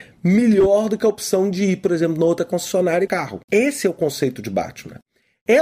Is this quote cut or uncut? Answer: cut